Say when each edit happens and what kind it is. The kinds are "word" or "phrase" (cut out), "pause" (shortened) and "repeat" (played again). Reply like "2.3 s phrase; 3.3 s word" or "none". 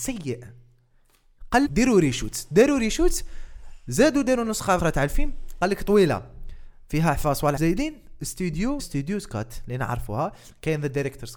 1.7 s word; 4.8 s word; 7.6 s word; 8.8 s word

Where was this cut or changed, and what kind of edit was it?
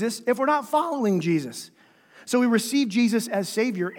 none

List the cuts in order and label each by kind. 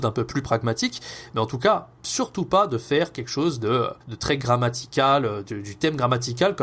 4.0 s pause

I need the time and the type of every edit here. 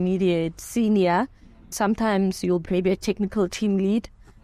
1.7 s phrase; 2.6 s word

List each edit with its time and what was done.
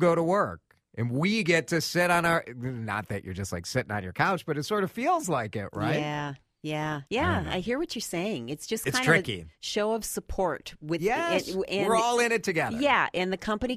7.1 s pause

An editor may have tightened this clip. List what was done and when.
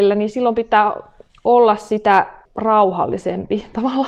2.4 s pause

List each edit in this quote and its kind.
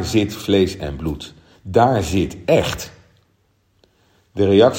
none

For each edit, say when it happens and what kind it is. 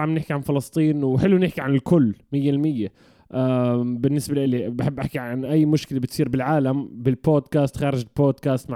none

